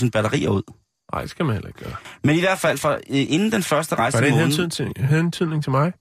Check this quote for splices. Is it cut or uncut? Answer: uncut